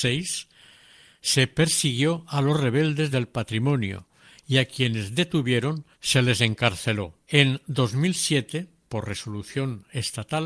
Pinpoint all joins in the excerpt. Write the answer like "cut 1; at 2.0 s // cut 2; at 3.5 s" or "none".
cut 1; at 3.1 s // cut 2; at 5.9 s // cut 3; at 7.2 s